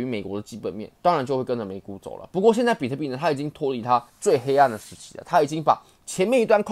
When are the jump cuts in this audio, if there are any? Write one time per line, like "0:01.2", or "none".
0:04.1